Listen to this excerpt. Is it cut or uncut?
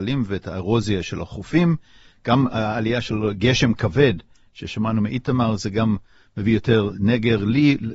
uncut